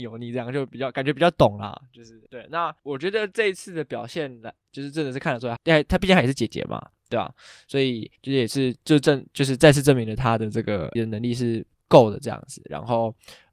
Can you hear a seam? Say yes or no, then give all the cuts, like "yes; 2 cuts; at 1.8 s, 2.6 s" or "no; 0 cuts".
yes; 5 cuts; at 2.3 s, 2.8 s, 5.6 s, 8.2 s, 11.0 s